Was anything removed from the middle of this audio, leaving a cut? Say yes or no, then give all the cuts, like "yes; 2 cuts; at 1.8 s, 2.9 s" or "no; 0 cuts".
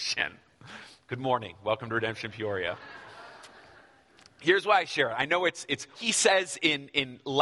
yes; 1 cut; at 5.9 s